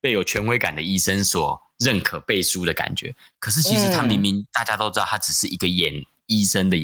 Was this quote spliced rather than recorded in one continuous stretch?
no; 0 cuts

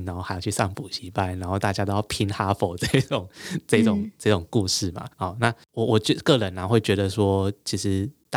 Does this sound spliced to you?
yes; 1 cut; at 5.1 s

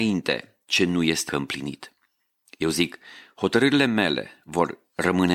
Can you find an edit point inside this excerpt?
yes; 1 cut; at 1.3 s

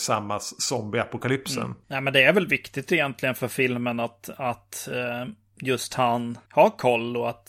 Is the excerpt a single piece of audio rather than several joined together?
yes; 0 cuts

